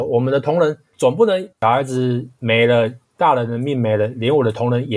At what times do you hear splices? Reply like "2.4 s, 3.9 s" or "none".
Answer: 1.5 s, 3.0 s